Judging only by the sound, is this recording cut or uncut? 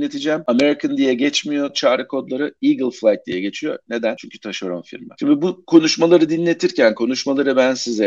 uncut